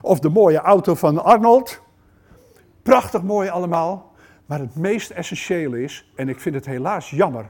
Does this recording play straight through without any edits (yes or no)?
yes